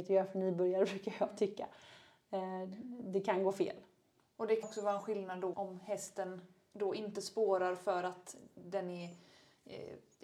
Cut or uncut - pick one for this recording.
cut